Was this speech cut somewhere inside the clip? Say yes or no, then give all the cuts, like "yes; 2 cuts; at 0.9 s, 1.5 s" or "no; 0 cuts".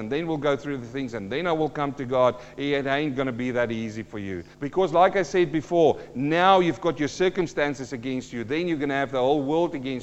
yes; 1 cut; at 4.5 s